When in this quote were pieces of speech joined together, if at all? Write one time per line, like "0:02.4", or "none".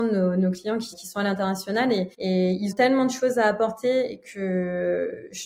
0:00.9
0:02.1
0:02.7

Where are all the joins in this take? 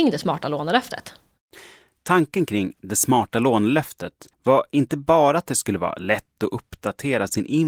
0:04.3

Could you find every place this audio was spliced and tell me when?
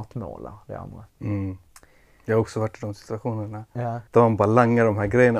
0:01.1
0:04.1

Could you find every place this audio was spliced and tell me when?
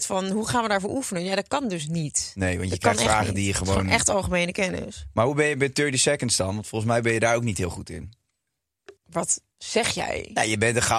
0:09.0

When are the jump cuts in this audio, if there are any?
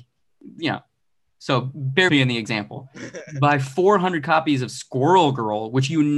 0:02.1

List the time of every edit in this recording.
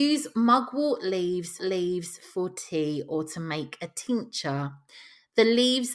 0:01.6

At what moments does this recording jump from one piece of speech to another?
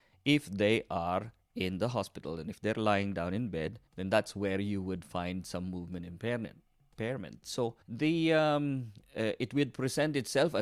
0:03.9
0:07.8

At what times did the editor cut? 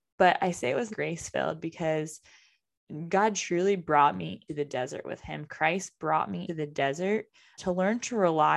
0:00.9
0:04.5
0:06.5
0:07.6

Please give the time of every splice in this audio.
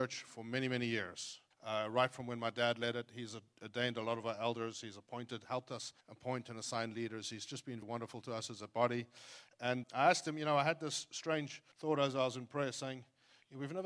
0:01.5
0:06.0
0:07.8
0:09.8
0:11.7

